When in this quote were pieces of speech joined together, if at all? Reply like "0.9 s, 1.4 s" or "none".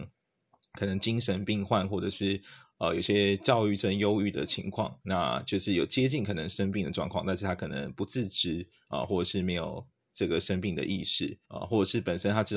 11.4 s